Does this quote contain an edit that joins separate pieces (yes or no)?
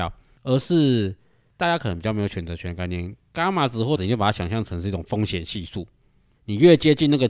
yes